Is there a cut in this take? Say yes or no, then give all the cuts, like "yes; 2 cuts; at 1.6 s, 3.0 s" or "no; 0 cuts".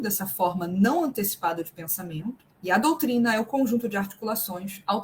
yes; 1 cut; at 2.5 s